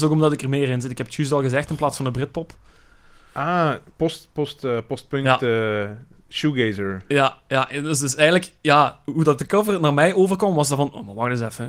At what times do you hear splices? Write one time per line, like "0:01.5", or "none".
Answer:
none